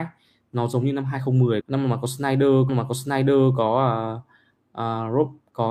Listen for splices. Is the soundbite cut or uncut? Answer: cut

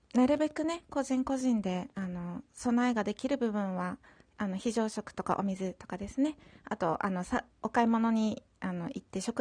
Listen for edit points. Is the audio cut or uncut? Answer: uncut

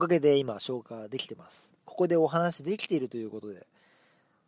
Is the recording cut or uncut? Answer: cut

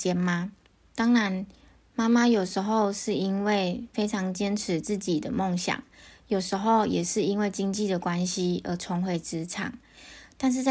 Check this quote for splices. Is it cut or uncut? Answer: uncut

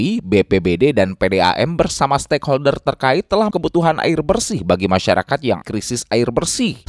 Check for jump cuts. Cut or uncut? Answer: cut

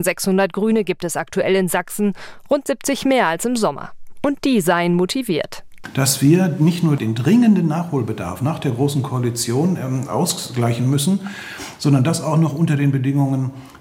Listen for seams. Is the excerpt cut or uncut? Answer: uncut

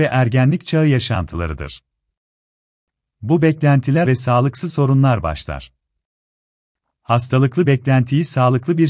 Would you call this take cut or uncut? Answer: cut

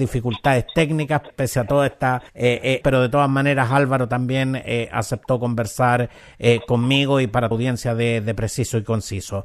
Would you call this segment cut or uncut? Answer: cut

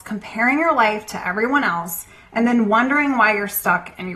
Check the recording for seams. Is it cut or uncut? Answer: uncut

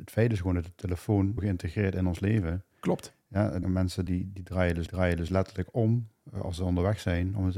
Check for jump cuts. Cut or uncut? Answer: cut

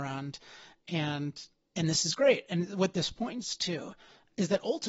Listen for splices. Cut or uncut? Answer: uncut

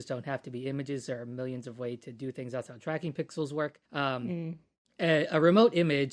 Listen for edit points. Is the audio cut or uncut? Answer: cut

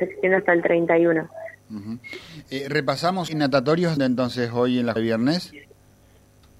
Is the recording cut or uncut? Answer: cut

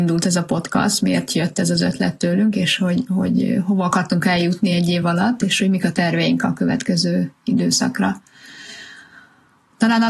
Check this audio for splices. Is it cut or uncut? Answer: uncut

